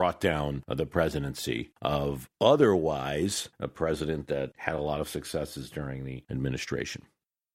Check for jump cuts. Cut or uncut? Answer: uncut